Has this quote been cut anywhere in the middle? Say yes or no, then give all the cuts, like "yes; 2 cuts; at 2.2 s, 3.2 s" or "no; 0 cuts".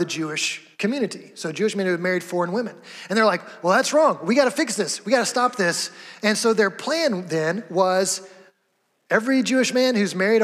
no; 0 cuts